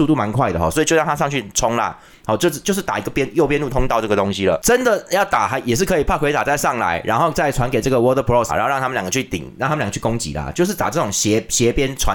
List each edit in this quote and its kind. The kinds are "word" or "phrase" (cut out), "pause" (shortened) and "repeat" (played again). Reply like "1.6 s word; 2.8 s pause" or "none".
8.5 s word